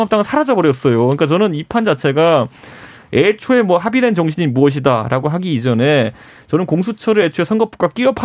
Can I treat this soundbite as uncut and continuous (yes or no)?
yes